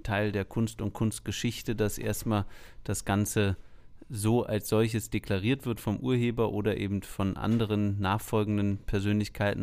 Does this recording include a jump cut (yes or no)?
no